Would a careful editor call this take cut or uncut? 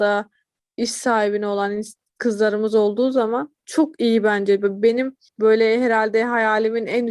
cut